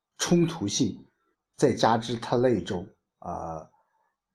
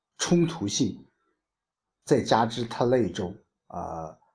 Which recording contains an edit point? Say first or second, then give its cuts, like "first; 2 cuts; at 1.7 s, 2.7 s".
first; 1 cut; at 1.3 s